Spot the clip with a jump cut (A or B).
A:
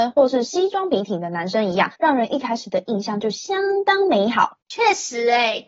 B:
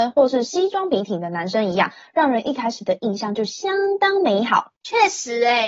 A